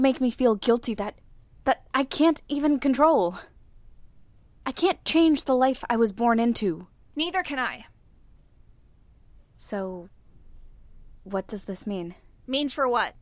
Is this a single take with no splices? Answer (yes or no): no